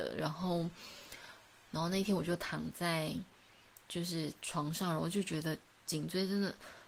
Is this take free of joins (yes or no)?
yes